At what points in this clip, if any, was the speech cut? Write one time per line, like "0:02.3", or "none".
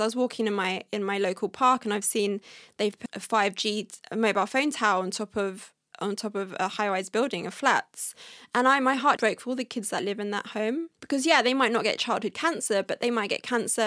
0:03.1
0:09.2
0:11.0